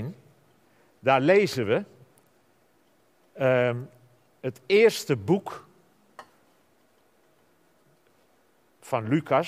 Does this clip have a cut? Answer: no; 0 cuts

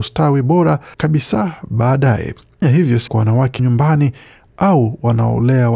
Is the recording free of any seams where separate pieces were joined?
no; 4 cuts; at 0.9 s, 2.6 s, 3.1 s, 3.6 s

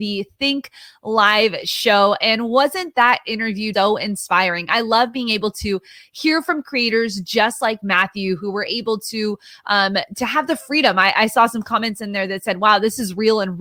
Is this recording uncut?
no; 1 cut; at 3.7 s

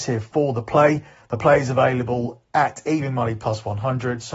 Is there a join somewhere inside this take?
no; 0 cuts

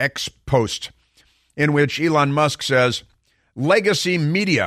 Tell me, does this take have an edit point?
no; 0 cuts

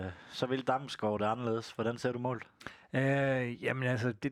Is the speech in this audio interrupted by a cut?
no; 0 cuts

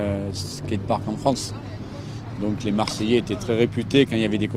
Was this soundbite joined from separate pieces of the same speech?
no; 0 cuts

